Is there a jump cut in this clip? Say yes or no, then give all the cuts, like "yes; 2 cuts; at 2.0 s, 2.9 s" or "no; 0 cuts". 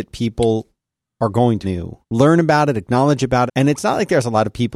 yes; 3 cuts; at 1.6 s, 2.0 s, 3.5 s